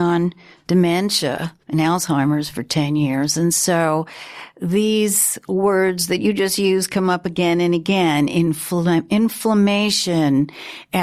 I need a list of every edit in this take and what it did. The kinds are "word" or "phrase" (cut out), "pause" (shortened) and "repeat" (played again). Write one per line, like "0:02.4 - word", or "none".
0:01.6 - pause